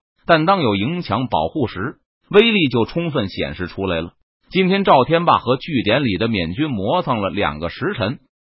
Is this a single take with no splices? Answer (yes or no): yes